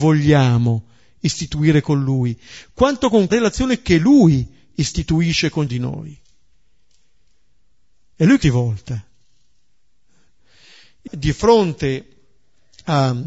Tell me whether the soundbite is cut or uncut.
cut